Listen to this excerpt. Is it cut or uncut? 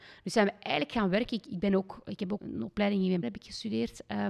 cut